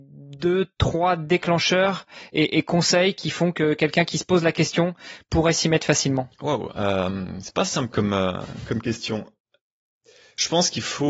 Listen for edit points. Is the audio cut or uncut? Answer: uncut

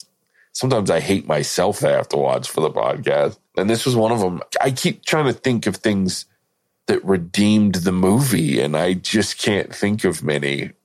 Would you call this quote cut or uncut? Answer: cut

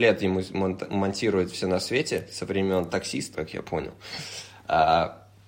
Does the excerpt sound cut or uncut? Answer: cut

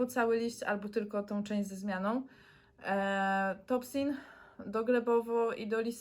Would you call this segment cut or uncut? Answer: uncut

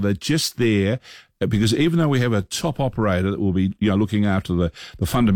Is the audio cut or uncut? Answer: uncut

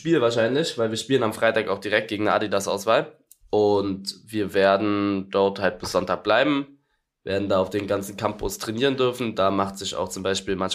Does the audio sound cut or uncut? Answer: uncut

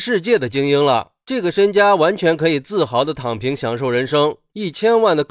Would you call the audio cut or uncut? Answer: uncut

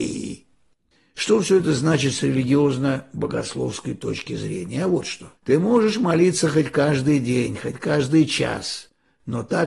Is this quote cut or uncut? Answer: cut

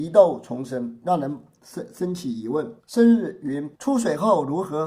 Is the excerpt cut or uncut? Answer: cut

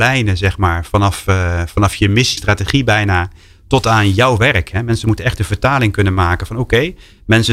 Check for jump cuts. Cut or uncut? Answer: cut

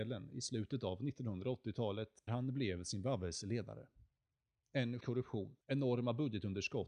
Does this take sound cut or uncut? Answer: cut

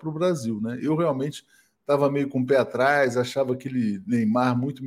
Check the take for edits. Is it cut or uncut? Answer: uncut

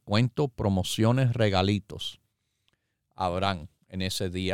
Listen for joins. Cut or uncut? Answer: uncut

